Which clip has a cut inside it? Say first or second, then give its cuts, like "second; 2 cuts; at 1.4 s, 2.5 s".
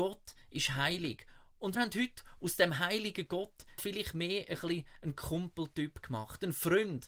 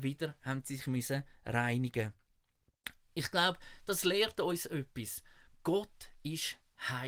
first; 2 cuts; at 1.8 s, 3.8 s